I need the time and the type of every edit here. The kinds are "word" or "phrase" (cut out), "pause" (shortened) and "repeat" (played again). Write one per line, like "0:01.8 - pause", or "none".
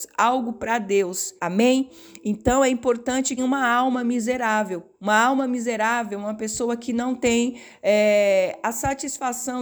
0:01.4 - pause
0:03.4 - phrase
0:04.9 - pause